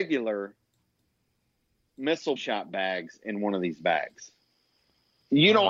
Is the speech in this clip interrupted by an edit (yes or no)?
yes